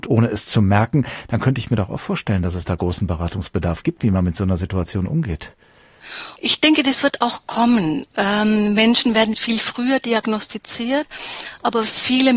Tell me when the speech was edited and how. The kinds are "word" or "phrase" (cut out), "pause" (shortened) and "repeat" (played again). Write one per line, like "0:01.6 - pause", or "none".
0:09.3 - word